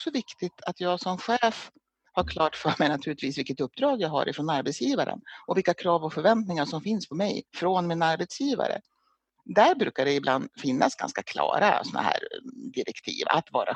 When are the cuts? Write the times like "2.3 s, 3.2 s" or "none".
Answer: 7.5 s